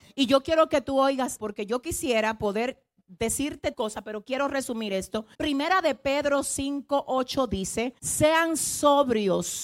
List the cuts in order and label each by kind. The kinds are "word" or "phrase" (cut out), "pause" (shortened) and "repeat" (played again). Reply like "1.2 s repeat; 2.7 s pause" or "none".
1.4 s word; 3.7 s word; 5.3 s pause; 8.0 s pause